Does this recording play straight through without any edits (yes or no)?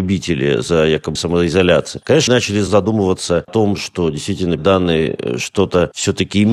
no